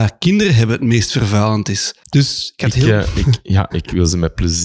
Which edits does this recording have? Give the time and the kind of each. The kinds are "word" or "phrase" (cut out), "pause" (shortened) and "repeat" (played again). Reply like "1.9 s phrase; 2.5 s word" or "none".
2.0 s pause